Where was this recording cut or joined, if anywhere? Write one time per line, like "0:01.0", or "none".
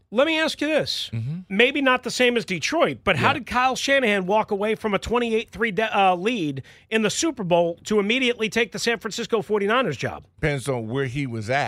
none